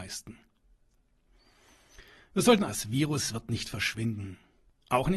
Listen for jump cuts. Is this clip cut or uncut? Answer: cut